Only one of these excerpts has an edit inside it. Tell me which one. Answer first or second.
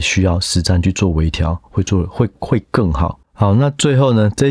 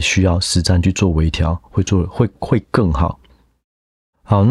first